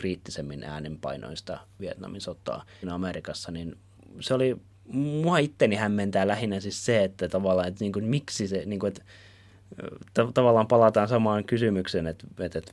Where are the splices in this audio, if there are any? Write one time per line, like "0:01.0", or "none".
0:02.8